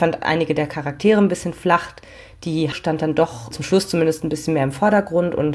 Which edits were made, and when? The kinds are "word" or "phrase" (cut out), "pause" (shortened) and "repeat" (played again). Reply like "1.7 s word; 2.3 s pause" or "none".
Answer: 2.7 s word; 3.5 s word